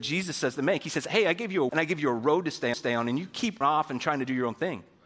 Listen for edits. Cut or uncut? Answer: cut